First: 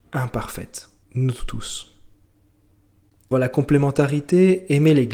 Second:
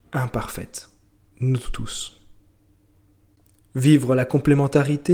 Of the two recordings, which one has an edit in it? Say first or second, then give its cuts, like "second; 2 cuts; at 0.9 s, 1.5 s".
first; 2 cuts; at 1.0 s, 3.3 s